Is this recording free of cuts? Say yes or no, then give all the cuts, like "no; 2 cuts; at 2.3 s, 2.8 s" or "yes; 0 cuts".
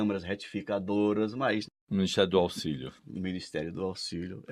no; 1 cut; at 3.0 s